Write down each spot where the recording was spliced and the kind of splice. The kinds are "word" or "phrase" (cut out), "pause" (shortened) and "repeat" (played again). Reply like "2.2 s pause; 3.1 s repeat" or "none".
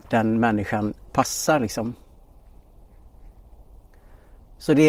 1.1 s phrase